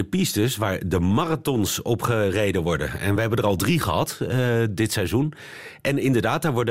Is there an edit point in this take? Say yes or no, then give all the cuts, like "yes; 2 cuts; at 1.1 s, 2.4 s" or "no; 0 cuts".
no; 0 cuts